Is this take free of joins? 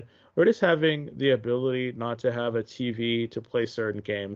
yes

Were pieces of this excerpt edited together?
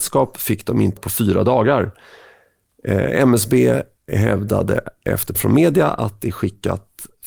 yes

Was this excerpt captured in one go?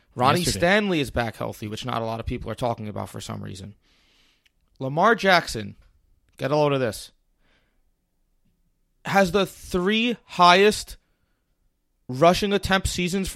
yes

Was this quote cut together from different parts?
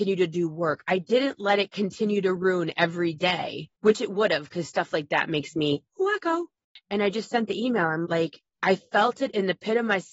yes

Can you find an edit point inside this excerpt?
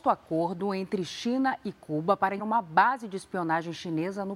yes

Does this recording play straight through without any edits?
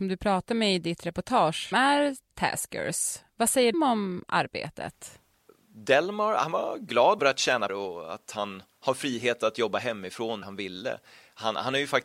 no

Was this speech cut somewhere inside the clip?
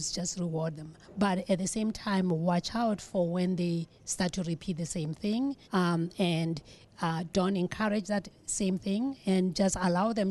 yes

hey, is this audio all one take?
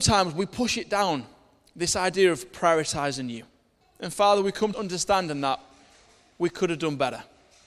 no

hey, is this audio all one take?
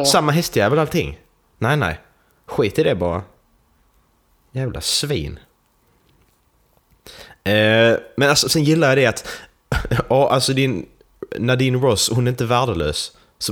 yes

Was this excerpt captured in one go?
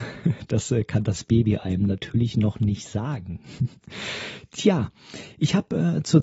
yes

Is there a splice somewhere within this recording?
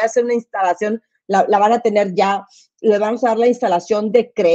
no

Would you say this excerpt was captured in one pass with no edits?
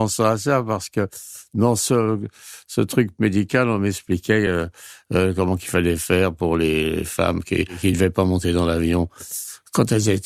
yes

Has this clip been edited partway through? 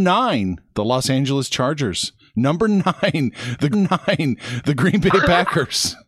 yes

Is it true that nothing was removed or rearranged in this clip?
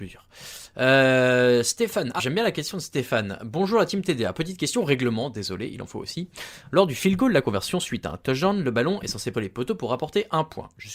no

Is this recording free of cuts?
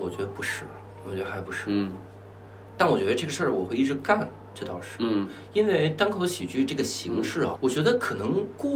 no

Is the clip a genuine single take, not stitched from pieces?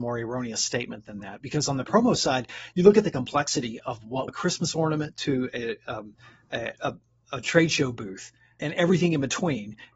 no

